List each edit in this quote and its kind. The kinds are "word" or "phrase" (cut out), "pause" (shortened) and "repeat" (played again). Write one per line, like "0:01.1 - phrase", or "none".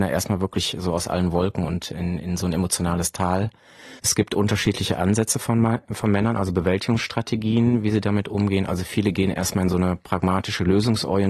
none